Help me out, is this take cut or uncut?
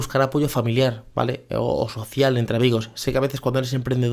uncut